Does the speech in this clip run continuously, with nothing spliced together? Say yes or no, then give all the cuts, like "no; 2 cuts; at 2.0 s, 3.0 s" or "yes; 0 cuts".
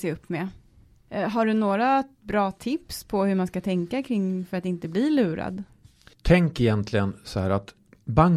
yes; 0 cuts